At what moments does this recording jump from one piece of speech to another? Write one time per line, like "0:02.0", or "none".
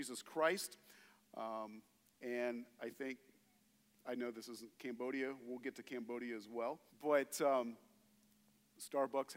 0:06.9

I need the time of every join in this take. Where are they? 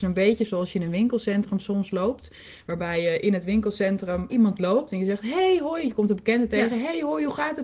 0:04.3

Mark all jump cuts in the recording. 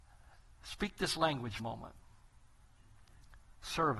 0:01.6

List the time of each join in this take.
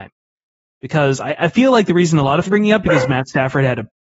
0:02.5

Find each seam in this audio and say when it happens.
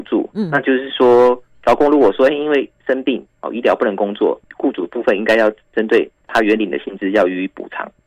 0:02.8

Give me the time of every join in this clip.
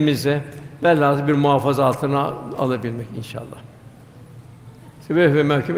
none

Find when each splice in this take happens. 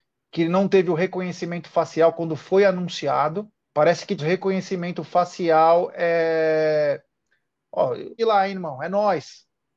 0:03.6
0:04.2
0:08.2

